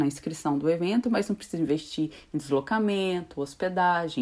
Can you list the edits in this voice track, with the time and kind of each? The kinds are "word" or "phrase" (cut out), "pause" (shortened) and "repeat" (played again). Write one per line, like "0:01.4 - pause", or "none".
none